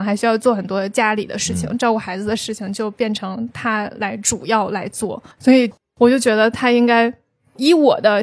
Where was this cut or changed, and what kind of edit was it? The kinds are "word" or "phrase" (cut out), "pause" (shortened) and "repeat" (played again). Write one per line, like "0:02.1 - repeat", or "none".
0:05.3 - pause

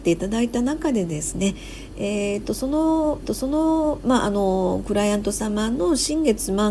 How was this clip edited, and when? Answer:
0:03.2 - repeat

